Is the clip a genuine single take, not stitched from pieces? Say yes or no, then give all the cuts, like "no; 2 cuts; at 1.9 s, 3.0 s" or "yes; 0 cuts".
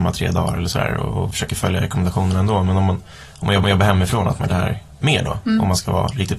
no; 2 cuts; at 3.6 s, 4.5 s